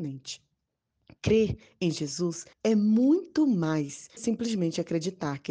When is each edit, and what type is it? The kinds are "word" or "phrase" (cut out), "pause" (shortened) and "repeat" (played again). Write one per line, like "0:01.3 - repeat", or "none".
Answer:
0:02.5 - pause
0:04.2 - phrase